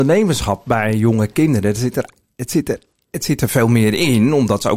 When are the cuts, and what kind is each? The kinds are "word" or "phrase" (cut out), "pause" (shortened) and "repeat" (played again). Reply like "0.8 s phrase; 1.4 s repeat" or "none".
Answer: none

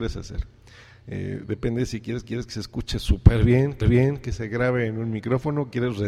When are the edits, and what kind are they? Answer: 2.2 s repeat; 3.8 s repeat

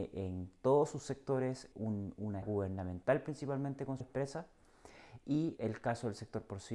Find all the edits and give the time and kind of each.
1.7 s word; 2.4 s word; 4.0 s word; 5.6 s word

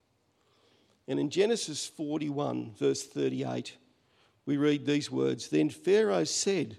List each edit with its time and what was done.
none

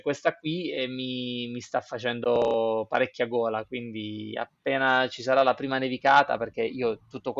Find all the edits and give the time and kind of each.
none

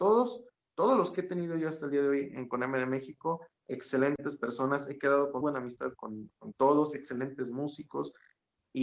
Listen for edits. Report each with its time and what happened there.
5.4 s word; 6.0 s word

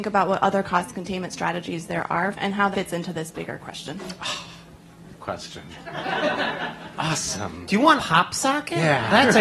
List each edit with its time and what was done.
2.3 s phrase; 2.7 s word; 5.2 s word; 8.0 s word

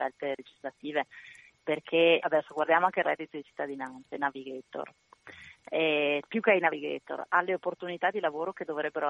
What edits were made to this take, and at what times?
2.2 s word; 6.2 s word

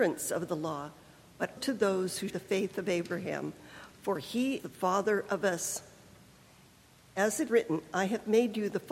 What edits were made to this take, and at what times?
1.6 s word; 2.3 s word; 4.6 s word; 7.5 s word

